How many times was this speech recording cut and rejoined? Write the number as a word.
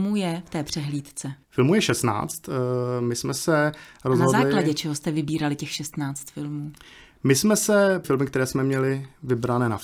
two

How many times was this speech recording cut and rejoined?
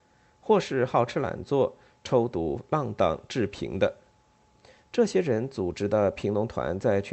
zero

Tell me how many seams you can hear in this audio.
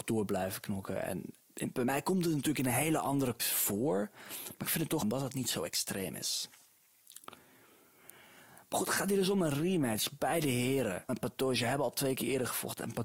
four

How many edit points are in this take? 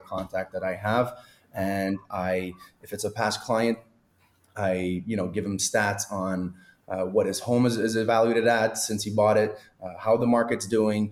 zero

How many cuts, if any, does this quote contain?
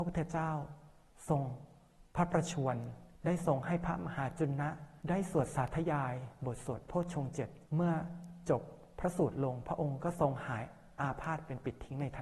four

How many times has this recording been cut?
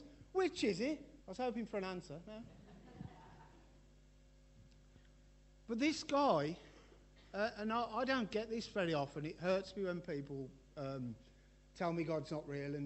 one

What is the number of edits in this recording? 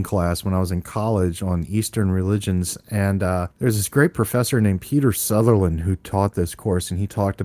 one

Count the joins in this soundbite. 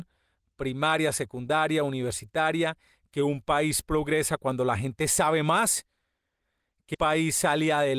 one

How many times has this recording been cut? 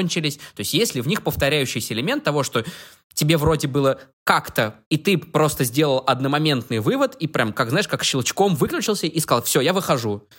one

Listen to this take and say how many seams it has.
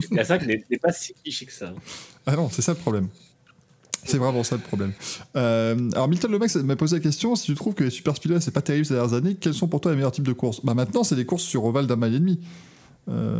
zero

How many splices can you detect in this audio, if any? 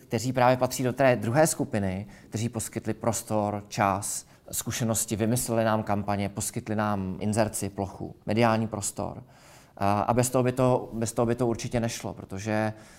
three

